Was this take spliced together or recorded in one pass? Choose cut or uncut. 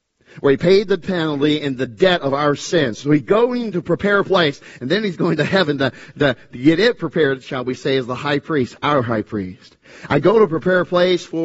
uncut